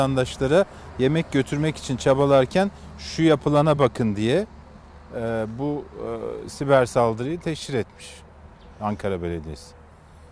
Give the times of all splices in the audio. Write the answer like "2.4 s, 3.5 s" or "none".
none